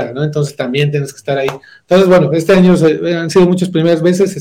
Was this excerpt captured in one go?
yes; 0 cuts

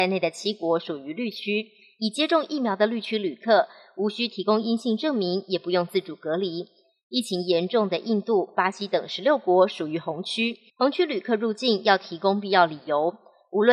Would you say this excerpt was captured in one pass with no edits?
no; 1 cut; at 10.7 s

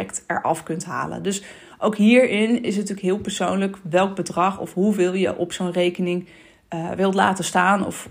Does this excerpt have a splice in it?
no; 0 cuts

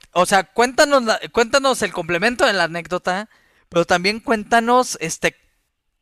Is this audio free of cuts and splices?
yes; 0 cuts

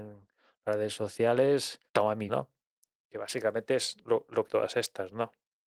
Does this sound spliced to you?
yes; 4 cuts; at 1.9 s, 2.3 s, 4.0 s, 4.5 s

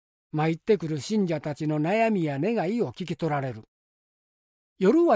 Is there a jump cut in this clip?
no; 0 cuts

